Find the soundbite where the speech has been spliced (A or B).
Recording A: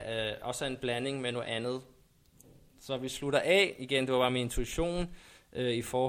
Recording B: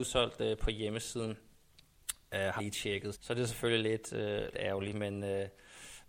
B